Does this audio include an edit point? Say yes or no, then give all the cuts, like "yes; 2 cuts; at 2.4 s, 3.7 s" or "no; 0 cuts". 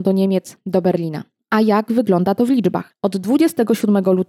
no; 0 cuts